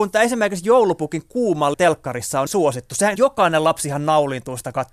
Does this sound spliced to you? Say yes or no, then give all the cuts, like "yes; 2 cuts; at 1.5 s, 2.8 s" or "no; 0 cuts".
yes; 3 cuts; at 1.7 s, 2.5 s, 3.2 s